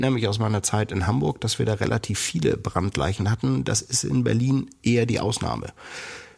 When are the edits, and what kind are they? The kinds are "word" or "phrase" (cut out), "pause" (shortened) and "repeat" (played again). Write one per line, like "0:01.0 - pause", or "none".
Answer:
none